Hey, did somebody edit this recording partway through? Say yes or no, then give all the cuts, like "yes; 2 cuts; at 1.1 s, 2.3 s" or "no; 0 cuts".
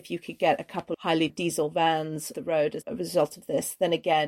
yes; 4 cuts; at 0.9 s, 1.3 s, 2.3 s, 2.8 s